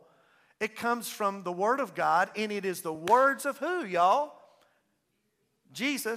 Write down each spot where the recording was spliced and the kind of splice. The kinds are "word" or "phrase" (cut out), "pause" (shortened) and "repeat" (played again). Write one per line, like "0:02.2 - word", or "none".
none